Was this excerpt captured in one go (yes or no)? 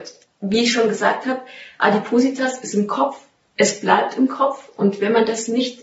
yes